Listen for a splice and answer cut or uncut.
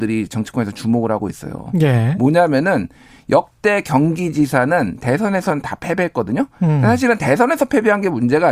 uncut